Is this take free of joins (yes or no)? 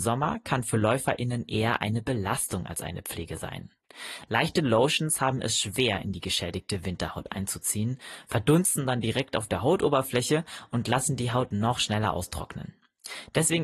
yes